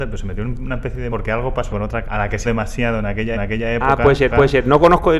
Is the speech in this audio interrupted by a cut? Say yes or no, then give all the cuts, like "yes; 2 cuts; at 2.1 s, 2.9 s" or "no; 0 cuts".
yes; 6 cuts; at 1.1 s, 1.7 s, 2.0 s, 2.4 s, 3.3 s, 4.3 s